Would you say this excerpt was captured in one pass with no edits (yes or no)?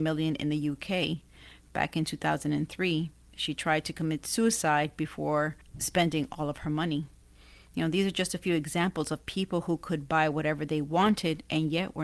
yes